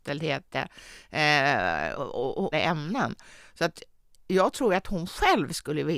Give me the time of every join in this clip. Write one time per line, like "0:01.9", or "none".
0:01.9
0:02.5